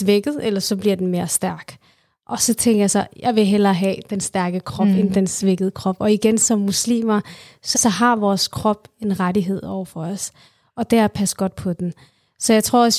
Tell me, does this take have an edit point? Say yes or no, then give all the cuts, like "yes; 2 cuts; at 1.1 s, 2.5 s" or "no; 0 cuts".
yes; 1 cut; at 7.7 s